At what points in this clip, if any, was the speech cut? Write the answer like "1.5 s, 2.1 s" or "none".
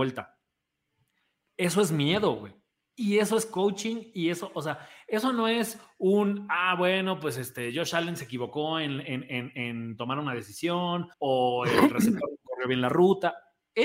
11.1 s